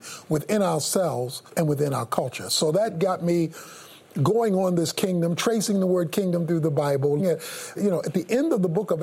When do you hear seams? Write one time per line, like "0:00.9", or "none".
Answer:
0:01.5
0:07.2
0:07.8